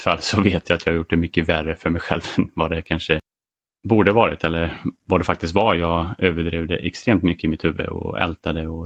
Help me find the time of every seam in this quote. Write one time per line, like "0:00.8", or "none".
none